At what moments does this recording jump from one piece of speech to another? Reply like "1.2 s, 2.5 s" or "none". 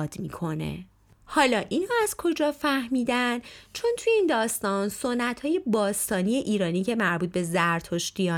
none